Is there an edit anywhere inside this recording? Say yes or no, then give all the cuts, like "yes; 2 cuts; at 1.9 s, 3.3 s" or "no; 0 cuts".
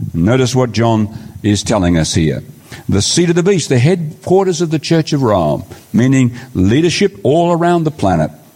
no; 0 cuts